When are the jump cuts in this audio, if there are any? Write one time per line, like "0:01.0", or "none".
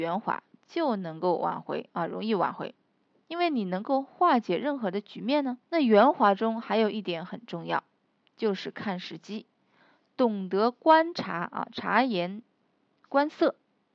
0:05.6